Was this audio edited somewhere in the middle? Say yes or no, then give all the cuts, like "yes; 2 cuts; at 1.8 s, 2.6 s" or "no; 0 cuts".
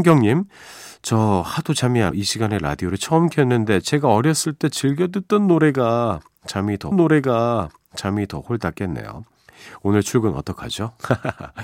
yes; 2 cuts; at 2.1 s, 6.9 s